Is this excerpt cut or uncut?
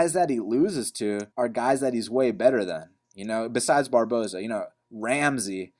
cut